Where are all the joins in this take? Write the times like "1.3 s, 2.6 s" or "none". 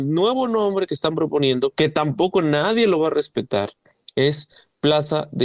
none